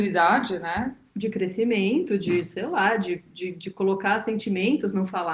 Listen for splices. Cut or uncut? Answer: uncut